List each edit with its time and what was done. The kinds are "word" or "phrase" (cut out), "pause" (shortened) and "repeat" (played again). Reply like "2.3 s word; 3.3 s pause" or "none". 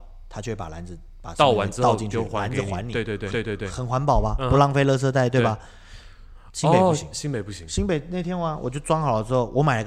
3.3 s repeat